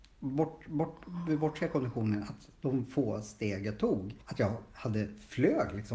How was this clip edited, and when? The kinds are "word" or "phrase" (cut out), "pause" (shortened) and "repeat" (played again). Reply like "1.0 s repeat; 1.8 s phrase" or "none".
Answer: 4.2 s pause

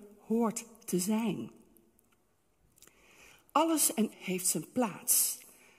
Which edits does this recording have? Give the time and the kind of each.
4.1 s word

